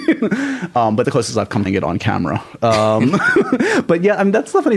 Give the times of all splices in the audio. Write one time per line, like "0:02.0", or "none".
0:01.0
0:01.7